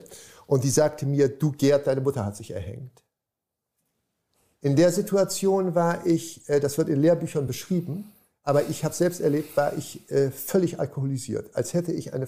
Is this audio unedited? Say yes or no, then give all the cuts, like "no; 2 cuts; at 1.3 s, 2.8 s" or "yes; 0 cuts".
yes; 0 cuts